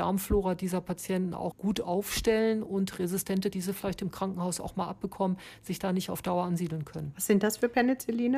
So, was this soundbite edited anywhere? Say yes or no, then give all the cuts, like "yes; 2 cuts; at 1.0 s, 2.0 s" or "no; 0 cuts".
yes; 2 cuts; at 1.5 s, 3.5 s